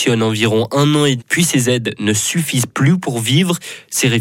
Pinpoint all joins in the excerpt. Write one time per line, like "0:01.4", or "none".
0:01.2